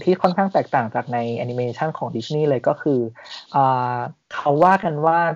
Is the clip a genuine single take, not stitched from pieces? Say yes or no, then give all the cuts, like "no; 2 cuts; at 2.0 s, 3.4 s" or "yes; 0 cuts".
no; 1 cut; at 3.5 s